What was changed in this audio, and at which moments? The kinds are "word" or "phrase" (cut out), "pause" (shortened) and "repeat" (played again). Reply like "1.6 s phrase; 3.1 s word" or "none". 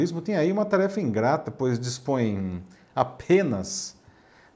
none